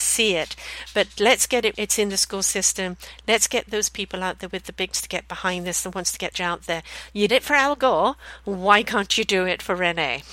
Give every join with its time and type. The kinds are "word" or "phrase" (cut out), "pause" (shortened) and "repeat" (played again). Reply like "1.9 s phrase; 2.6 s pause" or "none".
1.7 s word; 4.9 s phrase; 6.3 s phrase; 7.3 s word